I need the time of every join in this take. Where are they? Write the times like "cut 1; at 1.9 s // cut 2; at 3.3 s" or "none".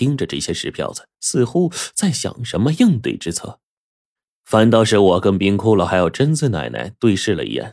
cut 1; at 4.2 s

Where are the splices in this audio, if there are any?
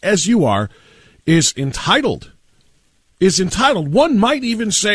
none

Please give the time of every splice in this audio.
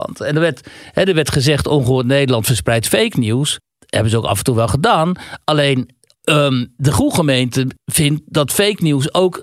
cut 1; at 3.7 s // cut 2; at 6.1 s

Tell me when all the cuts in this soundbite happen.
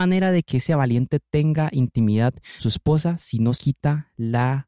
cut 1; at 2.6 s // cut 2; at 3.5 s

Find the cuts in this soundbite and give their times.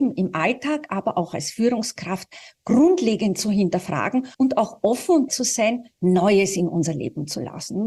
cut 1; at 4.3 s // cut 2; at 5.3 s // cut 3; at 5.9 s

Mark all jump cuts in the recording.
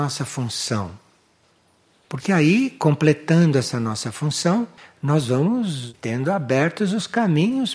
none

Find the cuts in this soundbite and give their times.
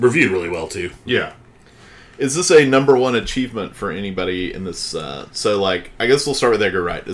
none

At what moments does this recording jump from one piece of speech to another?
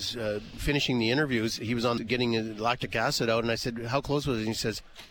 cut 1; at 2.0 s

